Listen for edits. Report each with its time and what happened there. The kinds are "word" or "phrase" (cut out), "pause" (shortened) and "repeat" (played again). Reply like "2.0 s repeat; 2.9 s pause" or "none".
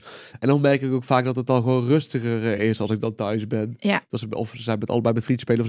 none